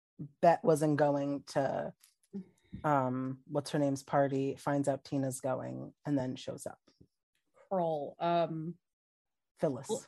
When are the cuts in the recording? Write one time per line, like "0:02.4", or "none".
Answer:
none